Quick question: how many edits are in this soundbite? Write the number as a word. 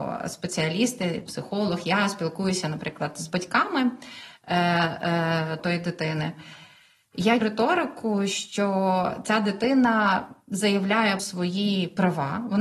four